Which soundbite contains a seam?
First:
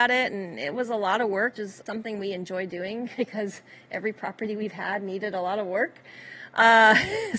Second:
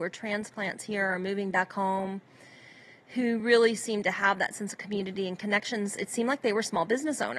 first; 2 cuts; at 1.6 s, 1.9 s

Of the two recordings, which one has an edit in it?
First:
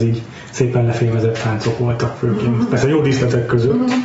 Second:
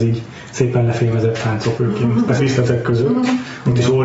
second; 2 cuts; at 1.8 s, 2.4 s

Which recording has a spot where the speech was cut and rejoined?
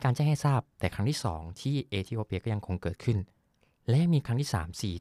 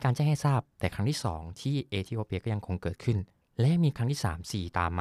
second; 1 cut; at 3.4 s

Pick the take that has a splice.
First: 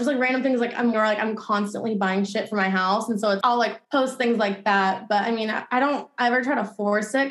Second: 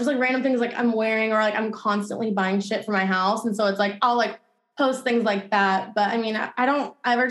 first; 3 cuts; at 0.9 s, 3.4 s, 3.8 s

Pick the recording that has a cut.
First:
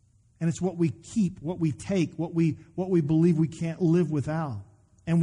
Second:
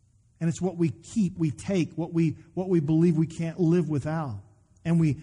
second; 1 cut; at 1.4 s

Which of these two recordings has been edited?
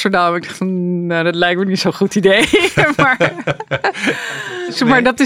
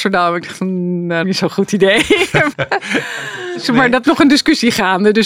second; 3 cuts; at 1.2 s, 2.5 s, 4.0 s

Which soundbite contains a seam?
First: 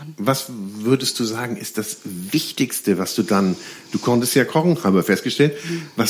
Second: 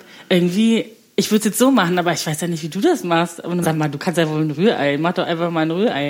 second; 1 cut; at 3.6 s

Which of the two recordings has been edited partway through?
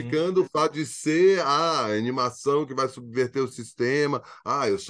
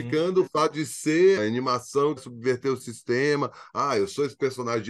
second; 2 cuts; at 1.4 s, 2.2 s

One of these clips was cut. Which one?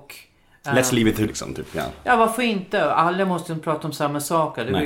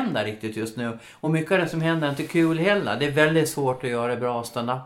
first; 1 cut; at 1.3 s

